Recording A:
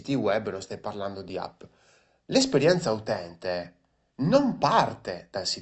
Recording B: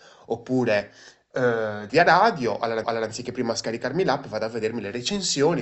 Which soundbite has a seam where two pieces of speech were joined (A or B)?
B